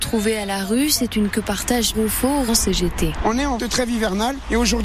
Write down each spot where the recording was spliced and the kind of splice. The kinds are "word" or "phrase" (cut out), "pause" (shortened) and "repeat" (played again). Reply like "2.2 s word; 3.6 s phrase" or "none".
1.3 s word; 1.9 s word; 2.5 s word; 3.6 s word